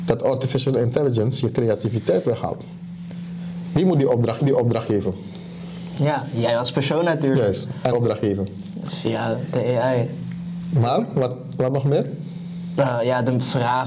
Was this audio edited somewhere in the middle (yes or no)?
yes